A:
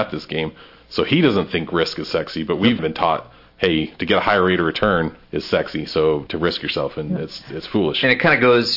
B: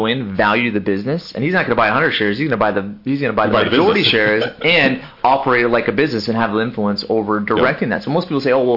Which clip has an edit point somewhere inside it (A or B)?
A